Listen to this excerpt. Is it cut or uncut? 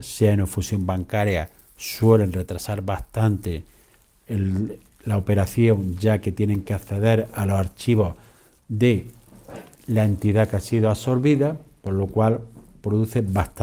uncut